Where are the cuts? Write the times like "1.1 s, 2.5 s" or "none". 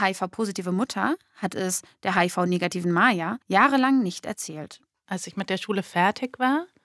3.4 s

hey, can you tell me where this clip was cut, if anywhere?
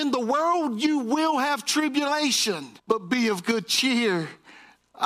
2.8 s

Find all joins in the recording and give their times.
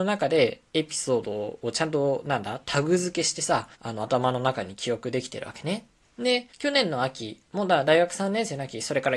3.7 s, 6.5 s

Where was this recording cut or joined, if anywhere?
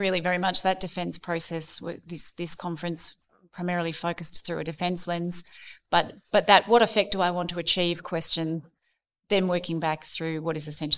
none

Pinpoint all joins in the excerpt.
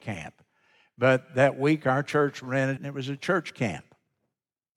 2.8 s

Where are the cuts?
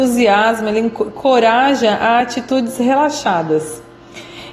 none

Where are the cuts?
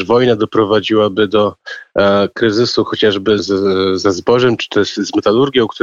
3.4 s

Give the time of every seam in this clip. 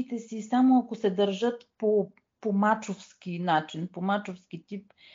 none

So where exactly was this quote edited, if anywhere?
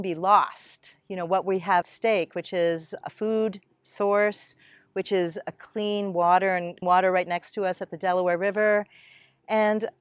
1.8 s, 3.0 s, 6.8 s

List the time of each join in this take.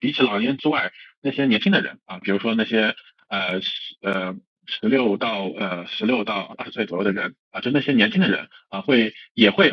7.4 s

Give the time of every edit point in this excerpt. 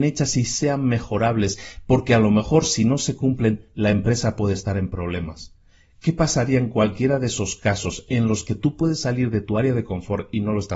none

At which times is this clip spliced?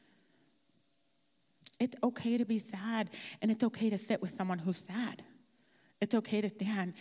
none

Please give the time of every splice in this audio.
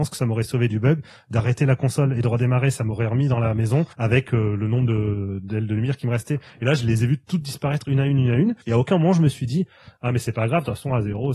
3.9 s, 8.6 s

